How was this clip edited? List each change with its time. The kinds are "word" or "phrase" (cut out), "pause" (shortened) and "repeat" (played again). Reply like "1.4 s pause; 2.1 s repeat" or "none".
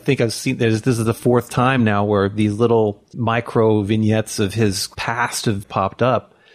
none